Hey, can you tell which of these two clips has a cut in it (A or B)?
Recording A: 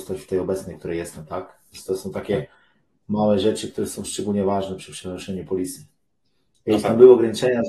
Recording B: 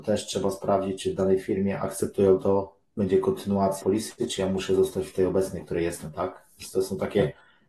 B